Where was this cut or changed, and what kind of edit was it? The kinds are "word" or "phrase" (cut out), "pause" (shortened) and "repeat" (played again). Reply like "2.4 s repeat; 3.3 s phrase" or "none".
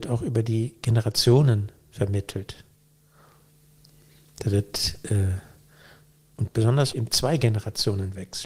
6.5 s word; 6.9 s word